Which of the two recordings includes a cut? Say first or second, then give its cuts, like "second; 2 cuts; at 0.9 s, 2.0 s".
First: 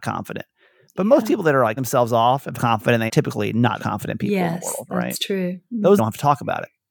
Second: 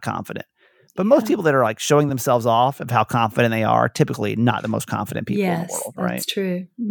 first; 5 cuts; at 1.8 s, 2.6 s, 3.1 s, 3.8 s, 6.0 s